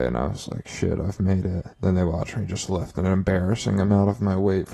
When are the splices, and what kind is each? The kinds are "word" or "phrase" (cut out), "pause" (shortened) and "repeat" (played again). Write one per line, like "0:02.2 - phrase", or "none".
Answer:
0:01.7 - pause